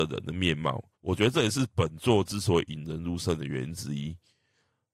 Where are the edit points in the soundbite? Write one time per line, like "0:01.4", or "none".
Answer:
0:00.9